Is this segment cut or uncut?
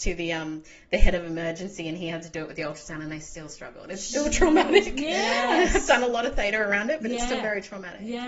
uncut